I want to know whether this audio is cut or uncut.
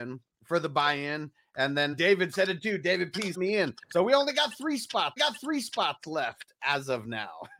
cut